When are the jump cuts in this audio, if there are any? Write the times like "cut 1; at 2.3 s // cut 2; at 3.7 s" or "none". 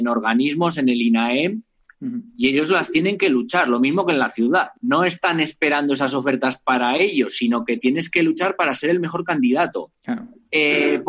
cut 1; at 10.0 s